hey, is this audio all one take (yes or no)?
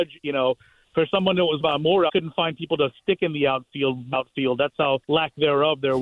no